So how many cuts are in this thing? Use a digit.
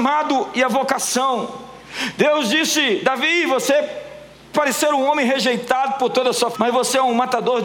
2